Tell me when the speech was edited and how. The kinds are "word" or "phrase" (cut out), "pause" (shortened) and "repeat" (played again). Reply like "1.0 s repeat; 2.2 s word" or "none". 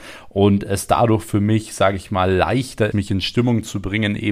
2.9 s word